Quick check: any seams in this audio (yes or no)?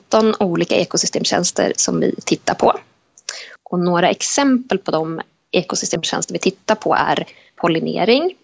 no